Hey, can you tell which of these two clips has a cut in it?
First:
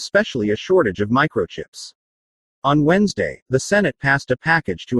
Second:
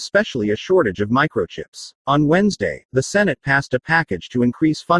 second; 1 cut; at 2.0 s

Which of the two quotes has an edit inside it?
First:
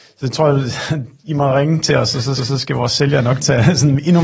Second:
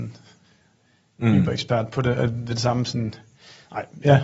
first; 2 cuts; at 1.2 s, 2.4 s

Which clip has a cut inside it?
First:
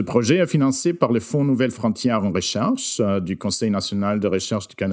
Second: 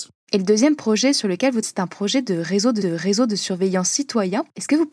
second; 2 cuts; at 1.6 s, 2.8 s

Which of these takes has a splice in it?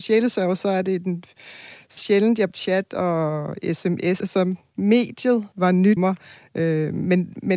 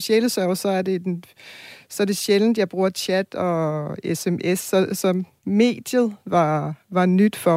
first; 5 cuts; at 2.0 s, 2.5 s, 4.2 s, 5.5 s, 6.0 s

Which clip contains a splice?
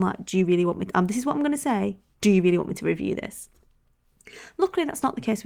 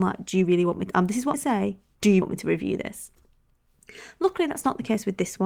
second; 2 cuts; at 1.3 s, 2.2 s

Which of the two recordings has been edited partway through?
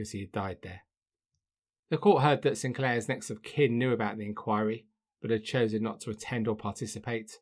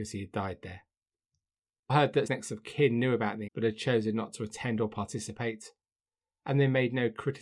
second; 3 cuts; at 1.9 s, 2.3 s, 3.5 s

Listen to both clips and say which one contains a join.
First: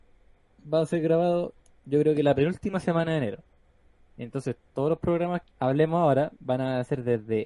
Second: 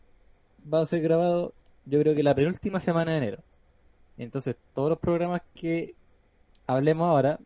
first; 1 cut; at 5.4 s

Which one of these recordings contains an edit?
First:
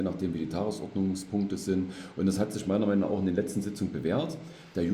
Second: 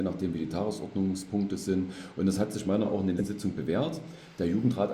second; 2 cuts; at 2.8 s, 3.2 s

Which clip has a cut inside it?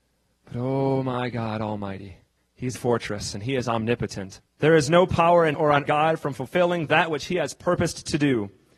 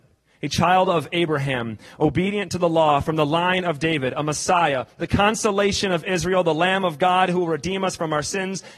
first; 5 cuts; at 2.4 s, 2.7 s, 4.5 s, 5.5 s, 5.9 s

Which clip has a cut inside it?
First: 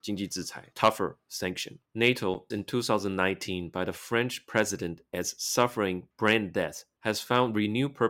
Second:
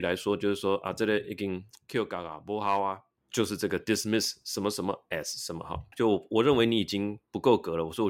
first; 1 cut; at 2.5 s

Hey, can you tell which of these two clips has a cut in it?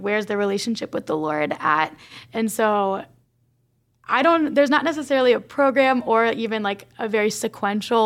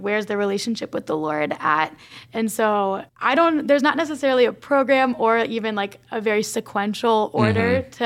second; 1 cut; at 3.1 s

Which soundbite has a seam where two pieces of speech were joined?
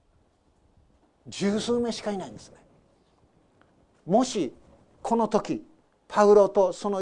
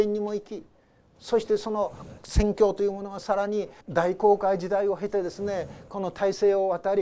second; 1 cut; at 3.8 s

